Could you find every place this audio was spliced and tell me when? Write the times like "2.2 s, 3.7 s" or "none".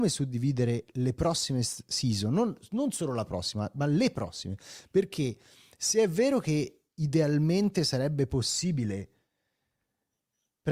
none